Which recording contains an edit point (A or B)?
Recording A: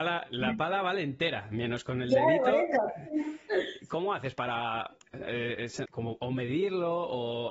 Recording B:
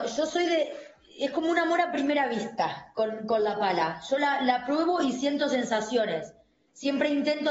A